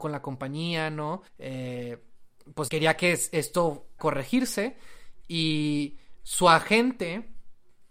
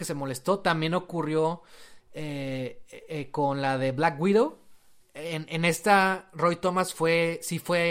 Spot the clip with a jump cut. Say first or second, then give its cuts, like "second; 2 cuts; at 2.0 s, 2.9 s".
first; 3 cuts; at 1.3 s, 2.7 s, 4.0 s